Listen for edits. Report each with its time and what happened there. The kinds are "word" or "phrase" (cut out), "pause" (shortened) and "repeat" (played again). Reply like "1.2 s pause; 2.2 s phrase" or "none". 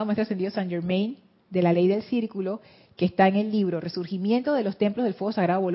none